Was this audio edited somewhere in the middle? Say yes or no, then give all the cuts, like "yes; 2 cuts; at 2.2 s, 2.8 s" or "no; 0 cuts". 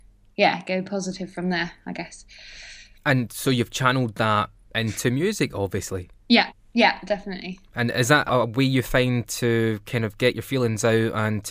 no; 0 cuts